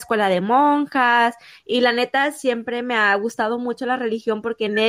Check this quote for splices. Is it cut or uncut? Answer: uncut